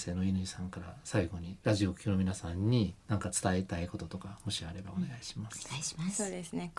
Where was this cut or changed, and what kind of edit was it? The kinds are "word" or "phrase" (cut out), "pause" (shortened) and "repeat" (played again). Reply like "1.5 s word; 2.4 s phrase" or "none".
1.6 s pause; 3.0 s pause